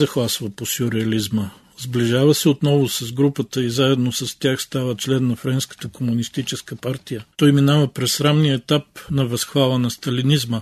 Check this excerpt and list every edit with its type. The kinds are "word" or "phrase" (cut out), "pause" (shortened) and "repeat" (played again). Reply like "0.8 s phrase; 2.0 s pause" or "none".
7.3 s pause